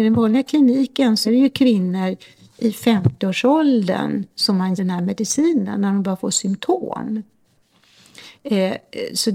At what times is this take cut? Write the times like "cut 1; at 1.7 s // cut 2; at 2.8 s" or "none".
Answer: cut 1; at 1.2 s // cut 2; at 4.8 s